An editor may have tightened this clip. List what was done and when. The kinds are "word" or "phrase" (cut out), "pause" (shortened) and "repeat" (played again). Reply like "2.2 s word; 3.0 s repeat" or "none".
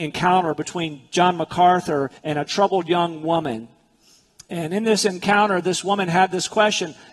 2.2 s pause